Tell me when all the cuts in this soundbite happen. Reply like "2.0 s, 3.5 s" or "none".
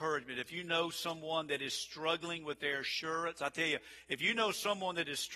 none